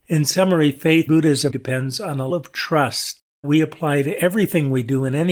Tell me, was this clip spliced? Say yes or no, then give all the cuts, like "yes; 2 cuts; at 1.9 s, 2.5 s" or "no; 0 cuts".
yes; 4 cuts; at 1.1 s, 1.5 s, 2.3 s, 3.4 s